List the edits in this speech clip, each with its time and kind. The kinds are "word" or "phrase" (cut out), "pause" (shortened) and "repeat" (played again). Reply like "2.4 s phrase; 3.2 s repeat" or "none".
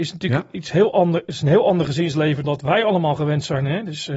2.4 s word

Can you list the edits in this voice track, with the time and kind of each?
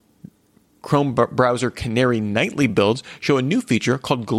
none

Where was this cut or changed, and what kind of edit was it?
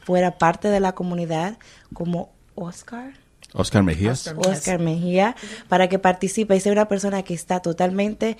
none

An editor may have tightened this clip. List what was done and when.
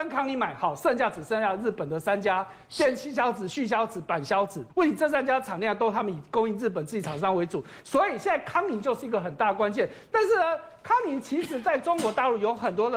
4.7 s pause

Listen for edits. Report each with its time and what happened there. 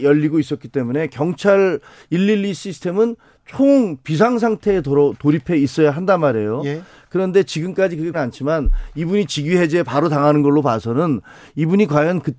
8.1 s word

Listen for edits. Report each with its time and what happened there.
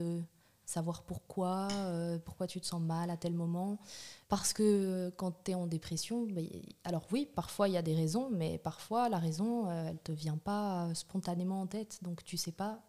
4.2 s pause

